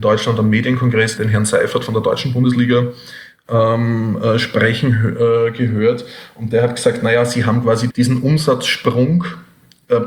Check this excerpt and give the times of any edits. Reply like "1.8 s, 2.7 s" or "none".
1.2 s, 7.9 s